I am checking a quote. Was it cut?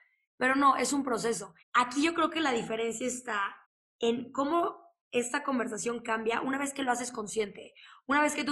yes; 2 cuts; at 1.6 s, 3.6 s

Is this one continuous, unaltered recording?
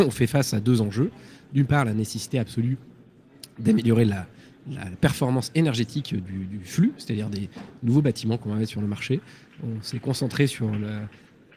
yes; 0 cuts

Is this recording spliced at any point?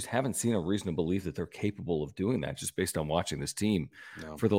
no; 0 cuts

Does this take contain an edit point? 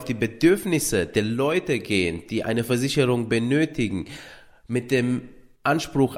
no; 0 cuts

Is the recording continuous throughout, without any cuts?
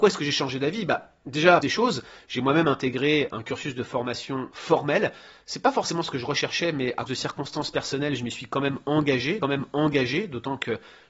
no; 4 cuts; at 1.6 s, 3.3 s, 7.1 s, 9.4 s

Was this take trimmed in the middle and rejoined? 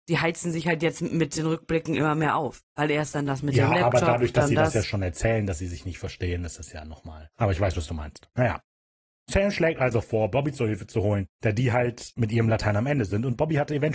no; 0 cuts

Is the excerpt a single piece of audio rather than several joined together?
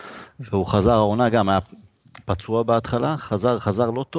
yes; 0 cuts

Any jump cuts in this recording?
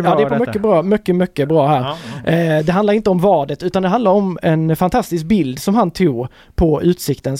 no; 0 cuts

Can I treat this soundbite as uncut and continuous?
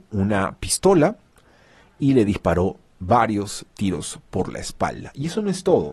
yes; 0 cuts

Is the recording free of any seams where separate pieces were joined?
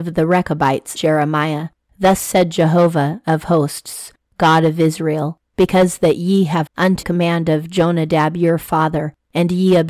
no; 3 cuts; at 1.0 s, 6.7 s, 7.0 s

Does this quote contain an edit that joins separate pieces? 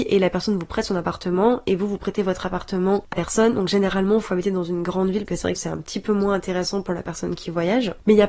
yes; 3 cuts; at 3.1 s, 5.3 s, 5.6 s

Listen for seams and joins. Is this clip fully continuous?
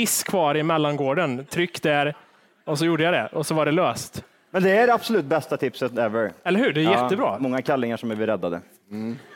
yes; 0 cuts

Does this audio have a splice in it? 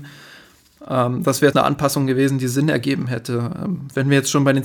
yes; 1 cut; at 1.5 s

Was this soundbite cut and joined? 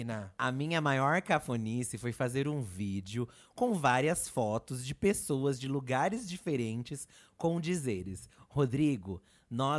no; 0 cuts

